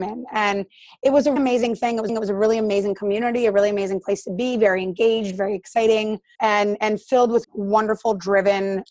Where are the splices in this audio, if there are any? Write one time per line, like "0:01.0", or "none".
0:01.4
0:02.1
0:06.3
0:07.4

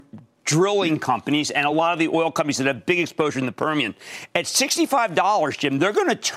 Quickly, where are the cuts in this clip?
none

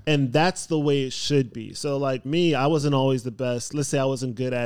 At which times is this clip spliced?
0:02.2

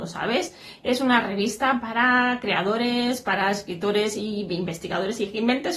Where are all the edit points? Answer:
none

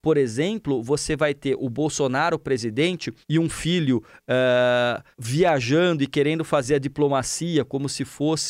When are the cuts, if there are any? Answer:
0:03.2
0:05.1

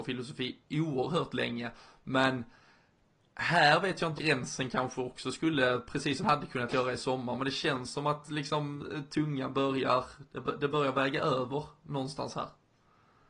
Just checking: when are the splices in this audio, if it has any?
0:04.2
0:06.2

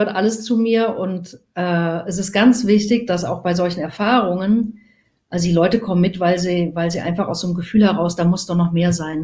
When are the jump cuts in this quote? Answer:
none

